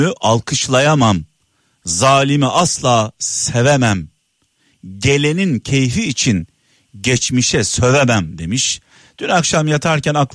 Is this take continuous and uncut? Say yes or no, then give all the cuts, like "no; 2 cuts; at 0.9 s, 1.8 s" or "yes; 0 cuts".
yes; 0 cuts